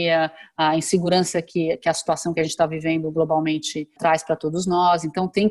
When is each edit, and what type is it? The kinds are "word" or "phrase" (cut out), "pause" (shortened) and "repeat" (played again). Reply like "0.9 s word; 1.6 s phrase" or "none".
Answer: none